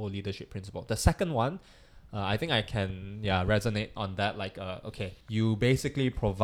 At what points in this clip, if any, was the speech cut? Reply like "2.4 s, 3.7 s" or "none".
5.2 s